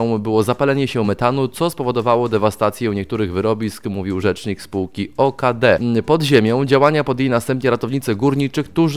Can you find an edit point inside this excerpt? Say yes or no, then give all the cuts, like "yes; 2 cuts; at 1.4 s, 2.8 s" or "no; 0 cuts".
no; 0 cuts